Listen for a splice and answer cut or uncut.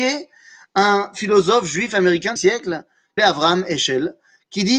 cut